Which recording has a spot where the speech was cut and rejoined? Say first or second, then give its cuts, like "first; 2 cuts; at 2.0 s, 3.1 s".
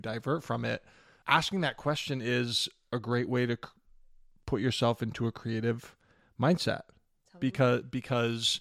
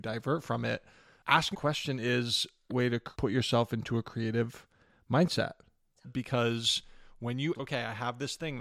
second; 5 cuts; at 1.5 s, 2.7 s, 3.1 s, 6.0 s, 7.5 s